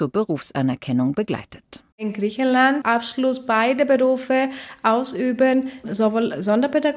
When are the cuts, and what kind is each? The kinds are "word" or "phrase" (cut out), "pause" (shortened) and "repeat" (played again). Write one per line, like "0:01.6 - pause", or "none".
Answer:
0:01.9 - pause
0:02.8 - phrase